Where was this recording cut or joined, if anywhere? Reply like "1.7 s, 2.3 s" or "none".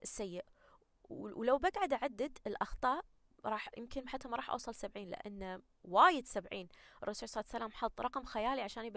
none